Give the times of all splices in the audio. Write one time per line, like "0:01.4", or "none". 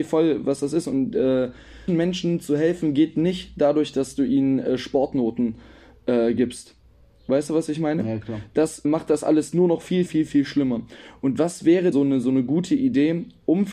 0:01.9
0:08.8
0:10.1
0:11.9

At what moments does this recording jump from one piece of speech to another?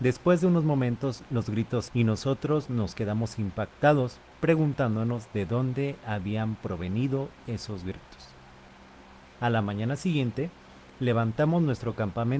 0:01.9

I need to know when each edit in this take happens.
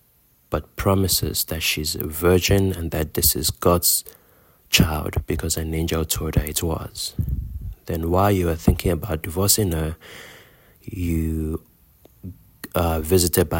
none

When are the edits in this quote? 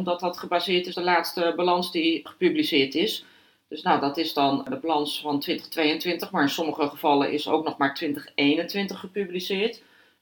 0:00.9

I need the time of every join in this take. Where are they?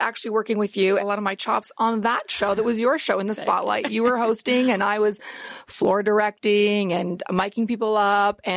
0:01.0

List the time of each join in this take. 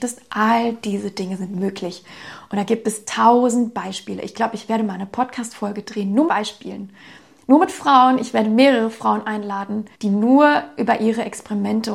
0:06.3
0:09.9

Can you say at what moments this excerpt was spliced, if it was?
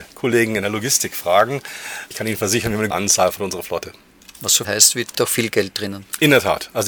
0:02.1
0:02.9
0:03.4
0:04.6
0:05.1

